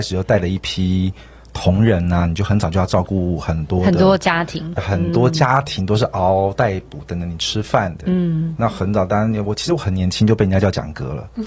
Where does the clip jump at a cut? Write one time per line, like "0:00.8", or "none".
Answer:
0:04.8